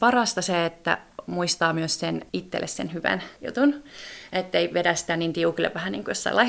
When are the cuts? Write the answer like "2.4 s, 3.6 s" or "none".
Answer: 2.3 s, 3.4 s